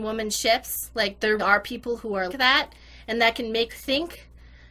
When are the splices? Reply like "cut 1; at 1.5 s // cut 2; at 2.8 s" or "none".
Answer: cut 1; at 1.4 s // cut 2; at 2.3 s // cut 3; at 3.7 s